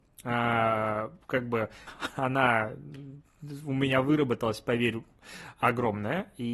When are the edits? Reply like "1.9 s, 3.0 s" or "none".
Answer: 1.9 s